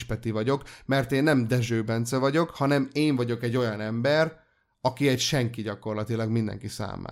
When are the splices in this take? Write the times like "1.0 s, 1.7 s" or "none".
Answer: none